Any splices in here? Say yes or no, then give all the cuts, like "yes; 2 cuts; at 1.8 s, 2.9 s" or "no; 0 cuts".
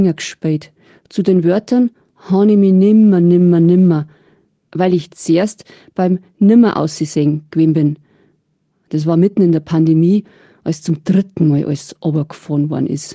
no; 0 cuts